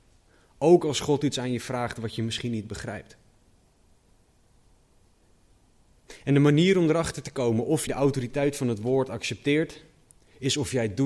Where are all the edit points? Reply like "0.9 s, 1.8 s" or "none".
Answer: 7.9 s